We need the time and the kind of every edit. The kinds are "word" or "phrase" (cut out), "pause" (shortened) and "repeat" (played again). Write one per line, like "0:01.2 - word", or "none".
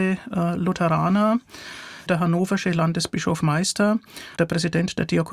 0:02.1 - word
0:03.4 - word
0:04.4 - word